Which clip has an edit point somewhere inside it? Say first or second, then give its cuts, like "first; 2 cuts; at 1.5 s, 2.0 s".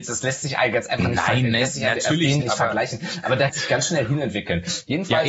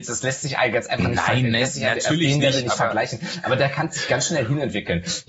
first; 2 cuts; at 2.4 s, 3.5 s